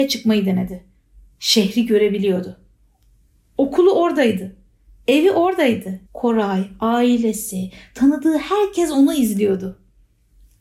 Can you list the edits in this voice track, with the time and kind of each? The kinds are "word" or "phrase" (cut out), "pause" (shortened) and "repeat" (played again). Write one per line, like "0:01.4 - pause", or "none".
0:06.1 - pause